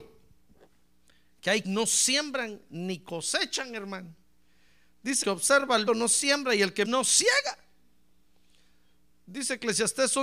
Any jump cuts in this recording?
yes; 4 cuts; at 1.6 s, 5.2 s, 5.9 s, 6.8 s

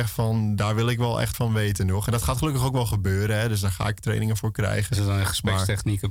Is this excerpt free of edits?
no; 1 cut; at 1.3 s

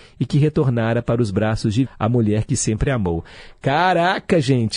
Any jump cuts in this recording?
yes; 1 cut; at 1.9 s

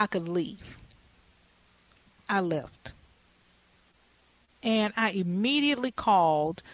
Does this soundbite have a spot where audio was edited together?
no; 0 cuts

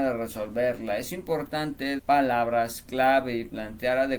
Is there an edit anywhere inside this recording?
yes; 1 cut; at 2.0 s

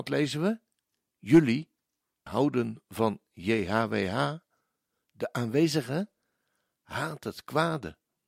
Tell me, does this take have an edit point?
yes; 1 cut; at 2.3 s

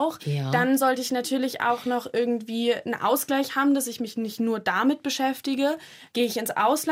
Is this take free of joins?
yes; 0 cuts

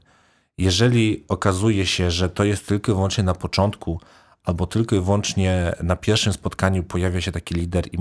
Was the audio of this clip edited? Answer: no; 0 cuts

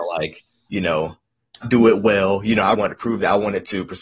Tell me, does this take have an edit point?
yes; 2 cuts; at 1.6 s, 2.7 s

